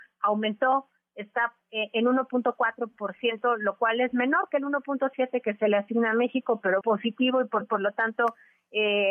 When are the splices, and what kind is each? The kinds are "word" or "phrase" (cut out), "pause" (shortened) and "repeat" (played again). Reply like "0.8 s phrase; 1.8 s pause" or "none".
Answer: 1.6 s word; 6.8 s word; 7.6 s repeat